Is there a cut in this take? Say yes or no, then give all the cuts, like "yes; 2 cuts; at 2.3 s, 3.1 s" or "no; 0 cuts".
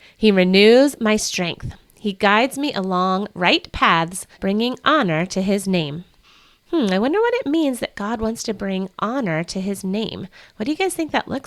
yes; 2 cuts; at 4.3 s, 6.2 s